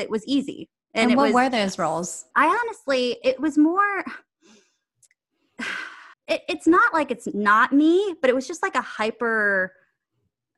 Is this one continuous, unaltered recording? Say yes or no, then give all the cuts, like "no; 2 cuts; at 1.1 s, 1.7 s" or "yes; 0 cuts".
no; 2 cuts; at 2.3 s, 6.1 s